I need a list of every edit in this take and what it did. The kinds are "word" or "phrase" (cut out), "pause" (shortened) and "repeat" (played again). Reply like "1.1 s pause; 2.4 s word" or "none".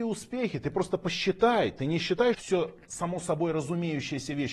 2.3 s phrase